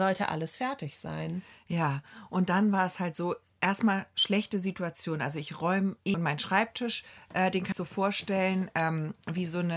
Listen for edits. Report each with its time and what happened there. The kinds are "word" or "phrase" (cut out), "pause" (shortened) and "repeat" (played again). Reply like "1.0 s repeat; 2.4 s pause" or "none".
6.1 s phrase; 7.7 s phrase